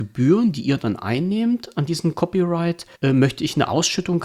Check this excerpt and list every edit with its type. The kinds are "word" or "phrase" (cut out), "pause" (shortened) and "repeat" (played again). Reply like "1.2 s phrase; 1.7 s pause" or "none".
2.9 s pause